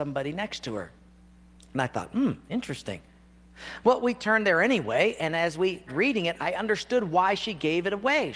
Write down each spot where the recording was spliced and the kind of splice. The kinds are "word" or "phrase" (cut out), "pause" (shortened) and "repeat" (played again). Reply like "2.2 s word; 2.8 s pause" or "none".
5.9 s word